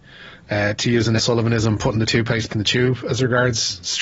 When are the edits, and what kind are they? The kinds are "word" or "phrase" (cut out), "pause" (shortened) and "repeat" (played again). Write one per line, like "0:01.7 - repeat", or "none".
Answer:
0:01.2 - word
0:02.5 - word